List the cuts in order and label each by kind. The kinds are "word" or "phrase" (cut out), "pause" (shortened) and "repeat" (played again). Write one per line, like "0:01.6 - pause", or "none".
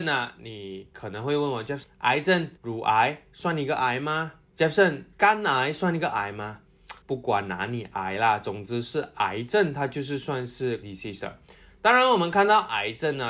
0:01.8 - word
0:02.6 - pause
0:05.1 - pause
0:07.0 - pause
0:10.8 - word